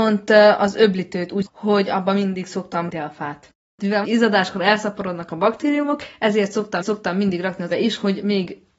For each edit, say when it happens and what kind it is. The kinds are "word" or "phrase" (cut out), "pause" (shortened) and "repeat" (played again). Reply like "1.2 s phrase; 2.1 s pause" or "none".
1.4 s phrase; 2.9 s word; 4.0 s phrase; 6.8 s repeat; 7.7 s word